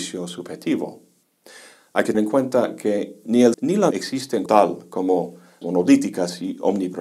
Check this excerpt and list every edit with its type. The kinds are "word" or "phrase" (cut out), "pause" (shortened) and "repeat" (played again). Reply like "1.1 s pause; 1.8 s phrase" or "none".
2.1 s word; 3.5 s word; 3.9 s word; 4.5 s word; 5.6 s word